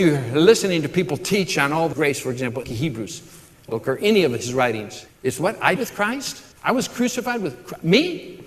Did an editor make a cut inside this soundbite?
yes; 6 cuts; at 1.9 s, 2.6 s, 3.7 s, 5.1 s, 5.8 s, 6.5 s

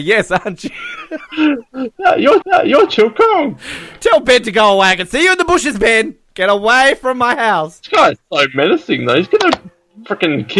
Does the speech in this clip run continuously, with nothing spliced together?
no; 1 cut; at 2.4 s

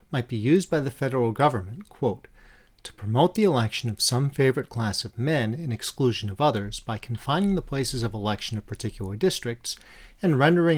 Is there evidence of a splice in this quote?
no; 0 cuts

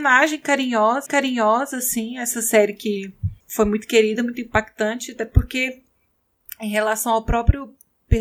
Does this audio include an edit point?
yes; 2 cuts; at 1.1 s, 3.4 s

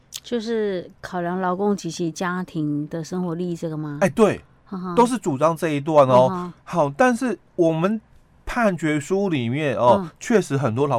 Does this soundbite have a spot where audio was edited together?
no; 0 cuts

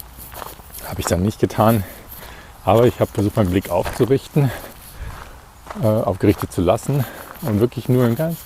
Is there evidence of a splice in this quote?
yes; 1 cut; at 3.1 s

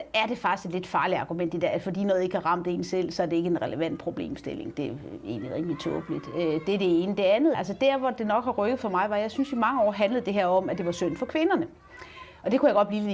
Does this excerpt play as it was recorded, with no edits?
no; 1 cut; at 7.5 s

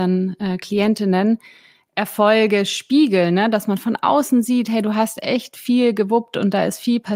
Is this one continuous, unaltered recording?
yes; 0 cuts

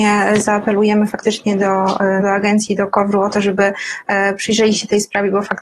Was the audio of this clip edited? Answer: yes; 1 cut; at 2.2 s

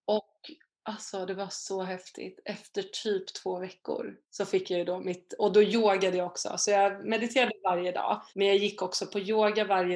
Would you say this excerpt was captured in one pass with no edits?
no; 2 cuts; at 4.2 s, 8.3 s

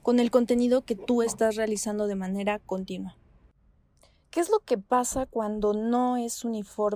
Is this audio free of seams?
yes; 0 cuts

